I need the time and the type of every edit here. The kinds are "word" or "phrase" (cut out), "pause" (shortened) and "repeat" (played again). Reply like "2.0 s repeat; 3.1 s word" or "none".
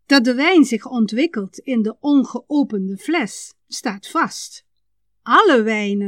none